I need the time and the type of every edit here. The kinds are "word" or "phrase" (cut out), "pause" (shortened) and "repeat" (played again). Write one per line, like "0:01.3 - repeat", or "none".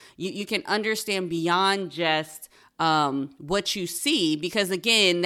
none